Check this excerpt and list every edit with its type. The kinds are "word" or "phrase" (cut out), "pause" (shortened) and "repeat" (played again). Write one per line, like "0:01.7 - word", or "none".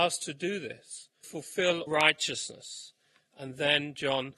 0:01.2 - word
0:01.9 - word